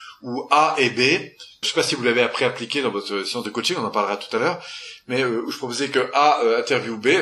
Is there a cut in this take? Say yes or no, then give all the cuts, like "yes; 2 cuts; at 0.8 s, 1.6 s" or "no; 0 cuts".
yes; 1 cut; at 1.6 s